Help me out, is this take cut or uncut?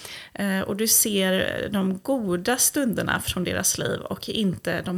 uncut